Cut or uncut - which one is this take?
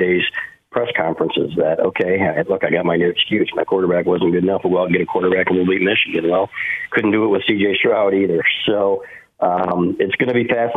uncut